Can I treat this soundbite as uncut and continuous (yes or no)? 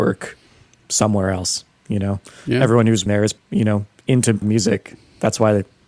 no